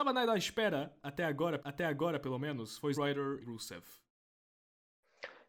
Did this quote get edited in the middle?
yes; 3 cuts; at 1.6 s, 2.9 s, 3.4 s

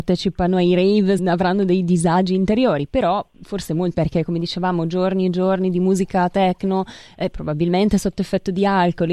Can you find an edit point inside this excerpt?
yes; 3 cuts; at 1.2 s, 3.3 s, 3.9 s

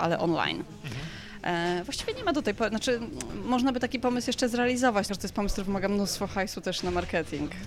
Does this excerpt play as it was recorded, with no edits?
no; 1 cut; at 5.1 s

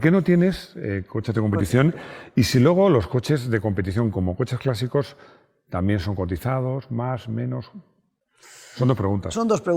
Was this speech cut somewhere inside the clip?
no; 0 cuts

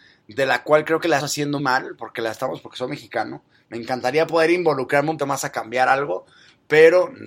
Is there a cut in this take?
yes; 3 cuts; at 1.2 s, 1.6 s, 5.2 s

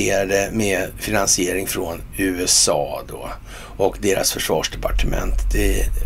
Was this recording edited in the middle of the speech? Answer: no; 0 cuts

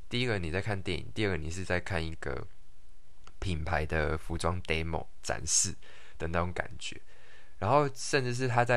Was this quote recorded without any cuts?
yes; 0 cuts

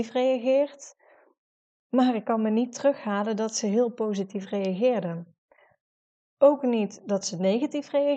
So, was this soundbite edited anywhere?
no; 0 cuts

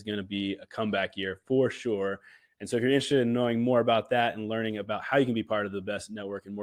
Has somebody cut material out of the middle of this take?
no; 0 cuts

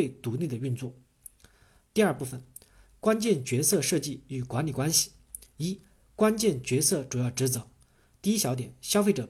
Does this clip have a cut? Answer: no; 0 cuts

